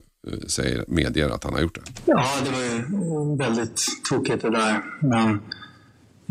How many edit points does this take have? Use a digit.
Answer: 0